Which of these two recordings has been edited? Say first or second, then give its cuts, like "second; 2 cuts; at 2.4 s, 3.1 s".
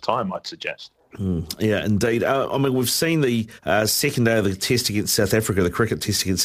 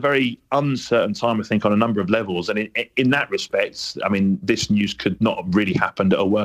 first; 1 cut; at 3.6 s